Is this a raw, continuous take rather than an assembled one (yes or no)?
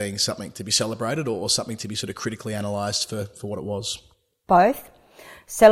yes